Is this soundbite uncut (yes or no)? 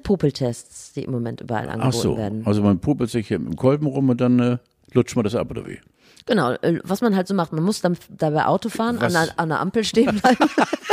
yes